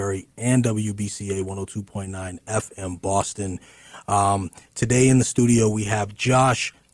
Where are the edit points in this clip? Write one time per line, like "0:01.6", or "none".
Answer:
none